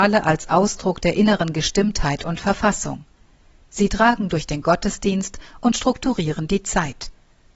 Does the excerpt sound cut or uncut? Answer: uncut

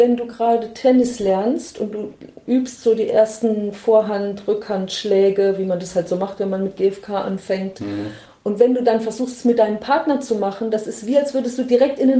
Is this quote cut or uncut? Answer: uncut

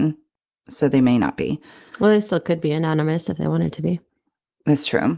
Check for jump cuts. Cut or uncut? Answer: uncut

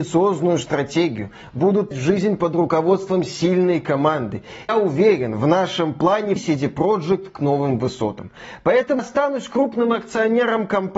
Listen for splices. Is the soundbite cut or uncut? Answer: cut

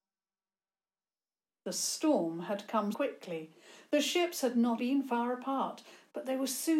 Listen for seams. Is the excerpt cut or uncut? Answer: cut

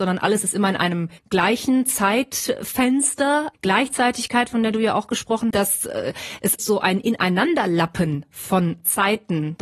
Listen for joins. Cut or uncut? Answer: cut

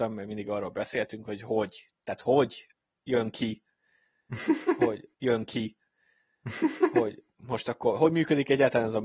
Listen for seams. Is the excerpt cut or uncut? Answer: cut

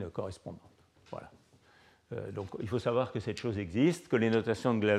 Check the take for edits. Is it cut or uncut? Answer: uncut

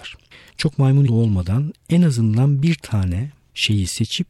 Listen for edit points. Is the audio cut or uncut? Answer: cut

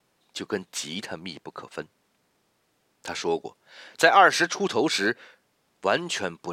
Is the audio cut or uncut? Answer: uncut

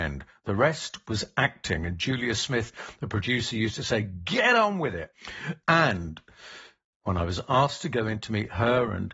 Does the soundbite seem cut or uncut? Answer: uncut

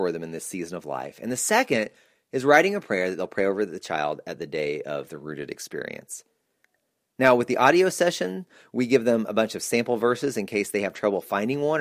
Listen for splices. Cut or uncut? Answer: uncut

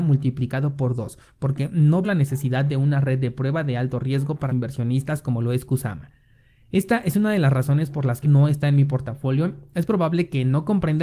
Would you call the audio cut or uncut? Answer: cut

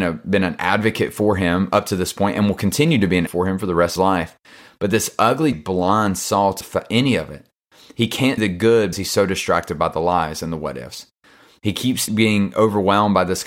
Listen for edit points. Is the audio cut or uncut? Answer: cut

